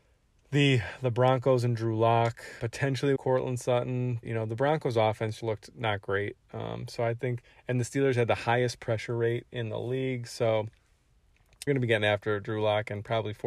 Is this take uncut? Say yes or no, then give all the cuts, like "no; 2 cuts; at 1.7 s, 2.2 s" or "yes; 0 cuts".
no; 5 cuts; at 2.6 s, 3.2 s, 4.2 s, 5.4 s, 11.7 s